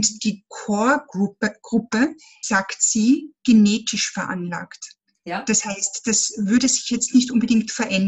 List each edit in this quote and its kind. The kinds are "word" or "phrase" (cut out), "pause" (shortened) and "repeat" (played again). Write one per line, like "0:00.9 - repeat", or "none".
0:02.4 - word